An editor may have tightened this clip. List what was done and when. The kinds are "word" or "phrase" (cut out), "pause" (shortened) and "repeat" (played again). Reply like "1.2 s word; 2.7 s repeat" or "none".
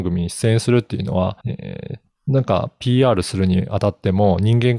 1.4 s pause